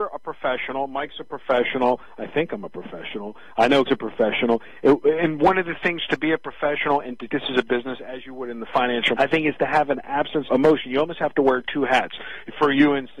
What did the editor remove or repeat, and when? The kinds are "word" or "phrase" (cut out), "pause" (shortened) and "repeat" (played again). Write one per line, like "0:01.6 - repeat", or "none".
0:03.9 - word
0:07.3 - word
0:09.2 - word
0:10.5 - word